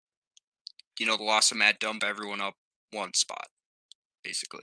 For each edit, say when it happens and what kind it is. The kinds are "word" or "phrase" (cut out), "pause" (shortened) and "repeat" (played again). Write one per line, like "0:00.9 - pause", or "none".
0:02.0 - phrase

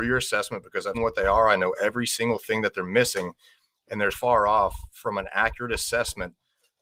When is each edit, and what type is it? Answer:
0:00.9 - word
0:04.1 - word

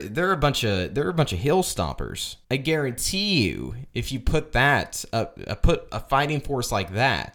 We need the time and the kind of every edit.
0:02.4 - pause

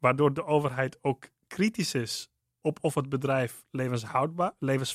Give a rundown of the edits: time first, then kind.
none

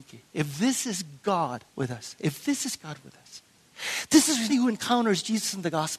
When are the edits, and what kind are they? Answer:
0:01.7 - pause
0:04.5 - phrase

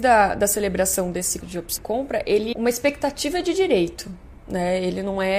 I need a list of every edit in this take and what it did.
0:01.4 - word
0:01.8 - word
0:02.5 - word

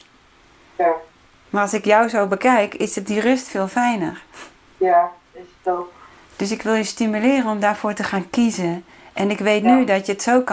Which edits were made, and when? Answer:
none

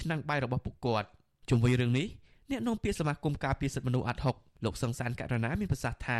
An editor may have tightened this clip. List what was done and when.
none

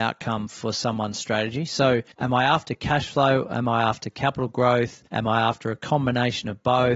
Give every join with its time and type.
0:02.1 - pause
0:05.1 - pause

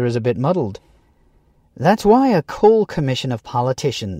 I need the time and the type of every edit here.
none

